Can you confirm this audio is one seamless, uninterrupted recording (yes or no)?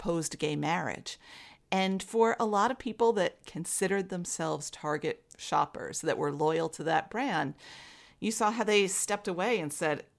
yes